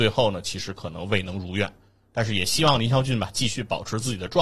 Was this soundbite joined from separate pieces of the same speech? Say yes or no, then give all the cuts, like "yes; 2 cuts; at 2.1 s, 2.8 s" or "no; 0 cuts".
no; 0 cuts